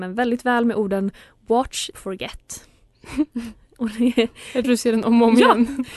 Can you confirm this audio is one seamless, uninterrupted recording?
no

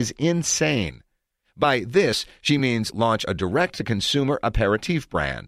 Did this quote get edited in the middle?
no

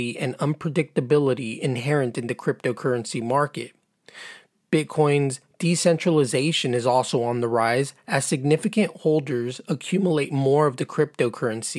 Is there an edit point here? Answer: no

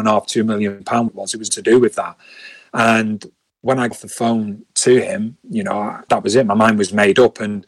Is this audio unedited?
no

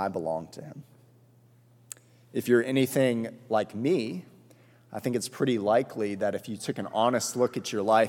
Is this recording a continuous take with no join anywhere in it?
yes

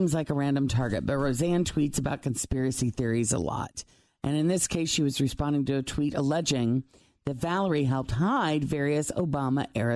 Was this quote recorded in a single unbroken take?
yes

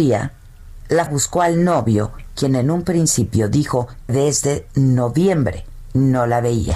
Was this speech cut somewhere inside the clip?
yes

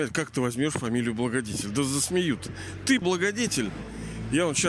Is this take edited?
yes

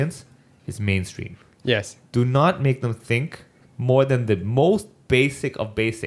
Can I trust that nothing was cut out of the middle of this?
yes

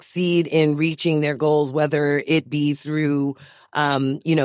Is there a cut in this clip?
no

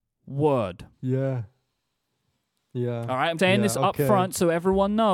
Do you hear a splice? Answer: yes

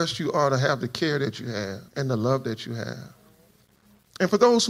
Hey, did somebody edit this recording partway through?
yes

